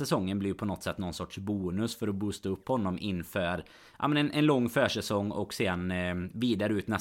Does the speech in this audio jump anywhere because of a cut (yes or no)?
no